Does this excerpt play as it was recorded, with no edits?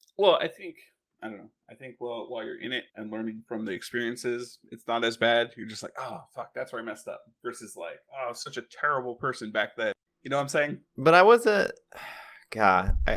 no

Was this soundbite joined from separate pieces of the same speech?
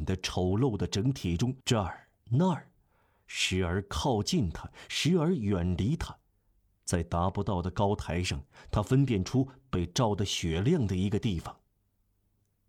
yes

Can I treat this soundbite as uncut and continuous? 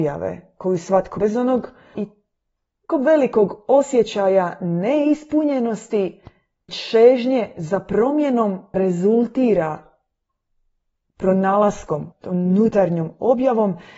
no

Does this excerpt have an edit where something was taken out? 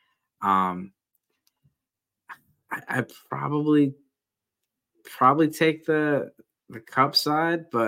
no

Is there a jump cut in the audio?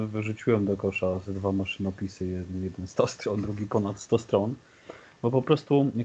no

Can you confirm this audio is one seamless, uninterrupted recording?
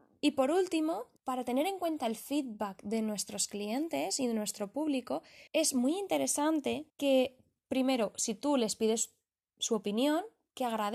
no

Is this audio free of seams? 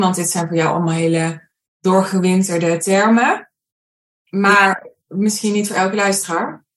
yes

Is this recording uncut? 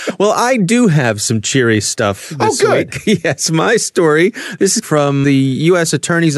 no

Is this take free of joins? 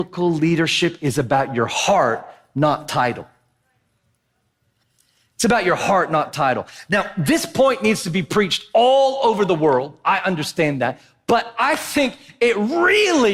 yes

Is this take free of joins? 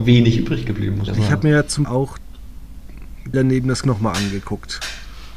no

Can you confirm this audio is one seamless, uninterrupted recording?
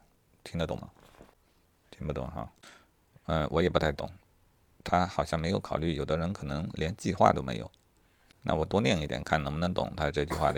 yes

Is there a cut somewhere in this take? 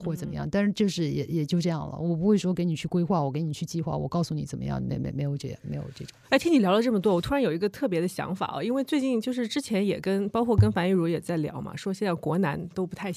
yes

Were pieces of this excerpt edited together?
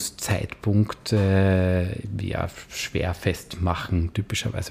no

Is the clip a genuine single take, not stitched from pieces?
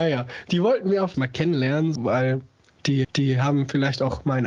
no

